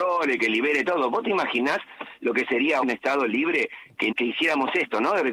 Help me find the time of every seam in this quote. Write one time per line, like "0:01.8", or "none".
0:02.8
0:04.1